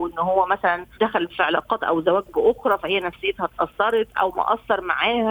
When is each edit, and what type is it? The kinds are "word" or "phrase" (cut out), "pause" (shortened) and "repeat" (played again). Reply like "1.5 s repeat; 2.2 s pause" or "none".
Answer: 0.9 s pause